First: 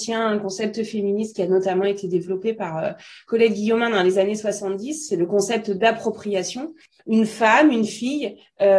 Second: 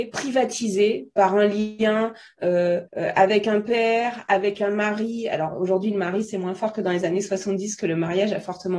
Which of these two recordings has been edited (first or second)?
second